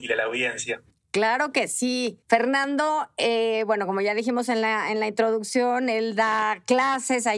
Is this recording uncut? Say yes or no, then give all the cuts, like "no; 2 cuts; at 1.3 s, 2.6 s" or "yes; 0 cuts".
no; 1 cut; at 2.2 s